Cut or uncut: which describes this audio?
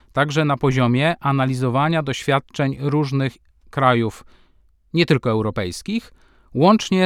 uncut